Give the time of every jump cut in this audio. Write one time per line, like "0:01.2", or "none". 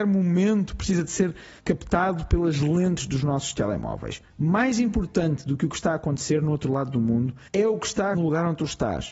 0:01.6
0:07.5
0:08.1

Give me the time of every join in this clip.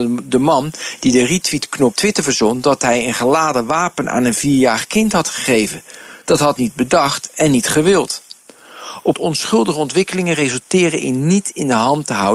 0:01.9
0:06.6
0:09.1

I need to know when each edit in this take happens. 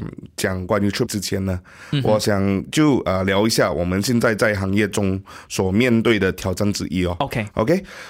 0:01.1

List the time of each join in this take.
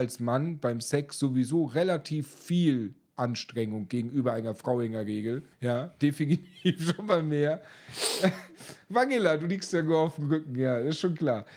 0:05.5

